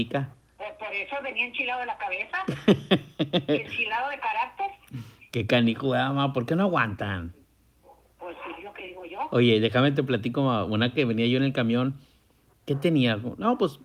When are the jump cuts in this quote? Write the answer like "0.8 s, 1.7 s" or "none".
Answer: none

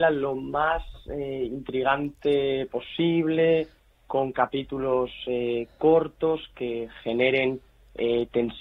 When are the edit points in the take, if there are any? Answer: none

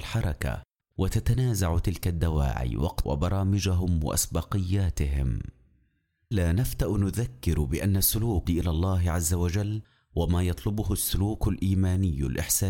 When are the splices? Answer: 3.0 s, 6.3 s, 8.5 s

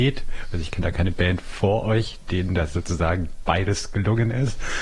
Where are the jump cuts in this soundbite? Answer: none

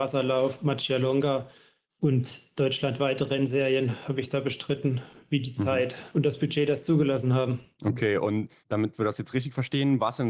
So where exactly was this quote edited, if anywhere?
none

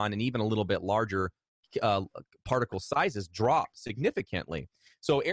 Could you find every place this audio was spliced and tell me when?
none

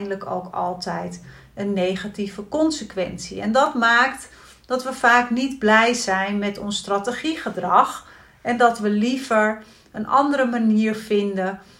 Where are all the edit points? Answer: none

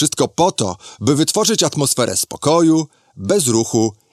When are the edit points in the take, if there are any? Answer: none

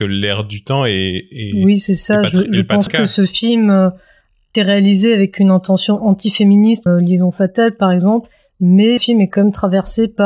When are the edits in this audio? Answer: 2.9 s, 4.5 s, 6.9 s, 9.0 s

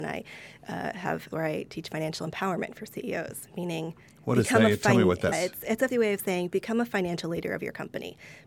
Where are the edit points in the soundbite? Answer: 1.3 s, 4.1 s, 5.3 s, 5.9 s

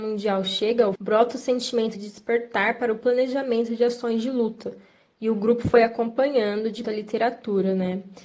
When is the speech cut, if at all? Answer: 1.0 s, 1.9 s, 6.8 s

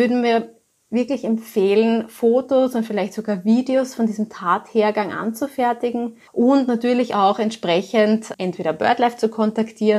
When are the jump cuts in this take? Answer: 6.3 s, 8.3 s

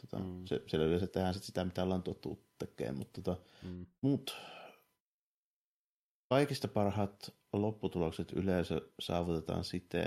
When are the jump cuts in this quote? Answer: 4.0 s

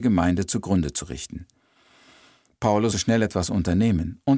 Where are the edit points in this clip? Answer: 2.9 s

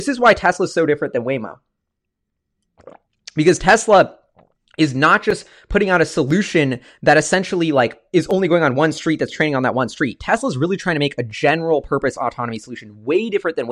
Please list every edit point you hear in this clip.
none

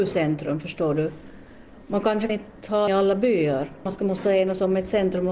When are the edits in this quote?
2.3 s, 2.9 s, 3.9 s

